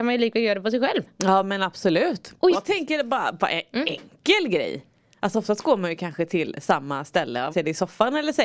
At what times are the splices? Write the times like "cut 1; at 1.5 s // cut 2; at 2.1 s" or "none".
cut 1; at 2.5 s // cut 2; at 7.5 s